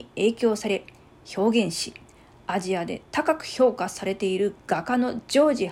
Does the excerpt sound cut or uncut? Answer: uncut